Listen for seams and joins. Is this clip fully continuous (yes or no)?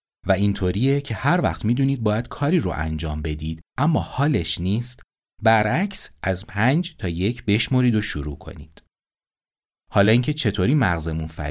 yes